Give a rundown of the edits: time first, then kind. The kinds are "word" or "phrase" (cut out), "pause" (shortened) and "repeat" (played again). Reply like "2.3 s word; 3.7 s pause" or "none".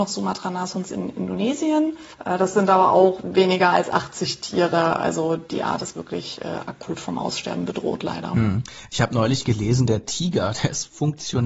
2.1 s pause